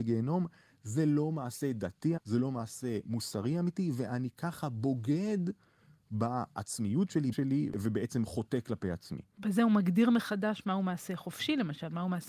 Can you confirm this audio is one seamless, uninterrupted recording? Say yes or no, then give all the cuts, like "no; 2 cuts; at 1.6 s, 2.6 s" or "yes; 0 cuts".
no; 2 cuts; at 2.2 s, 7.3 s